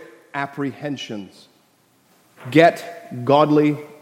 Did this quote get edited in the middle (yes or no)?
no